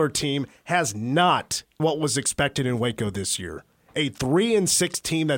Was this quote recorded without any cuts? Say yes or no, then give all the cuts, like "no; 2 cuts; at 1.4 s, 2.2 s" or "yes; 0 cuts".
no; 1 cut; at 1.8 s